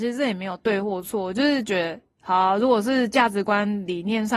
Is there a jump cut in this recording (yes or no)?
no